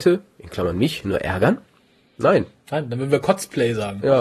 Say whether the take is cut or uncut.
uncut